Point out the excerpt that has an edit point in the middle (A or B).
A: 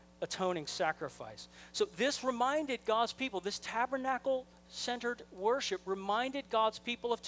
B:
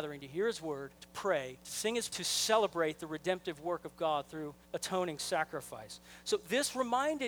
B